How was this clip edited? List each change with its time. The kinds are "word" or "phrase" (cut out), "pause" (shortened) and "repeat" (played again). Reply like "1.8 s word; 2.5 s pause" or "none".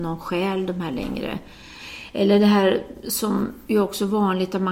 none